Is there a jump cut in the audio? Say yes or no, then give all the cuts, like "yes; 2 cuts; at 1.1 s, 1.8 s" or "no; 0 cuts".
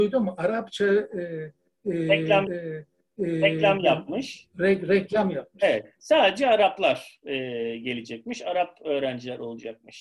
yes; 1 cut; at 2.5 s